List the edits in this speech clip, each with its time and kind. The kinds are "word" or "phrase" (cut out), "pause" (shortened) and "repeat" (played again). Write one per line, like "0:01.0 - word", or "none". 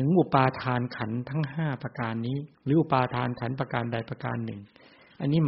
0:02.5 - pause